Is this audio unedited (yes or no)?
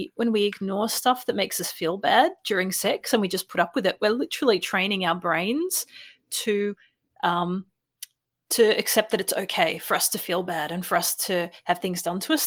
yes